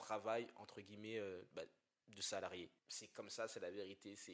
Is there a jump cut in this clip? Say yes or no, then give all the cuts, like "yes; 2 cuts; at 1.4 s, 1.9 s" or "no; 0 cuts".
yes; 1 cut; at 2.8 s